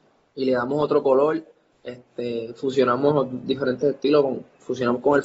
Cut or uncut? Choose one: uncut